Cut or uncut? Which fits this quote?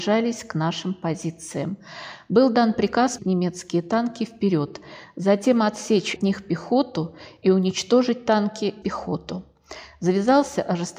cut